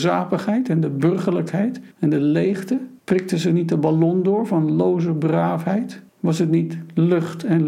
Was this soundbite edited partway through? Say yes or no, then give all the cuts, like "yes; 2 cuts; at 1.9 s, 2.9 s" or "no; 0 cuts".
yes; 3 cuts; at 1.9 s, 3.0 s, 6.1 s